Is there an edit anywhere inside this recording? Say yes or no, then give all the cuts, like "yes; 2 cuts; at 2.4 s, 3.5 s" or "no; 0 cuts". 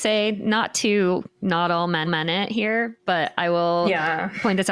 yes; 1 cut; at 2.1 s